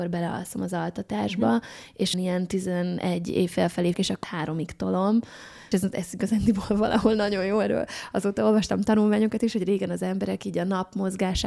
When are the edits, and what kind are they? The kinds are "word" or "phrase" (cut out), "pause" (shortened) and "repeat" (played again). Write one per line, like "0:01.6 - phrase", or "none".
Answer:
0:02.1 - word
0:03.9 - word
0:04.2 - word
0:05.7 - word